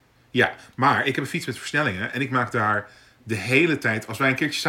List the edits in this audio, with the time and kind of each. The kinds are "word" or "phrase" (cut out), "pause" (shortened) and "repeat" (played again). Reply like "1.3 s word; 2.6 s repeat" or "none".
none